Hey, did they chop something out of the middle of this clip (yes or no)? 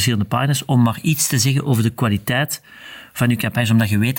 no